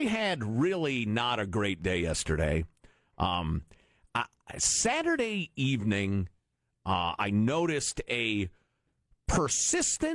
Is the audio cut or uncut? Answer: uncut